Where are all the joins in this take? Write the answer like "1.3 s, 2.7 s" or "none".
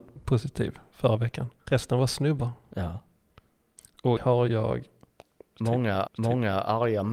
1.6 s, 4.2 s, 6.1 s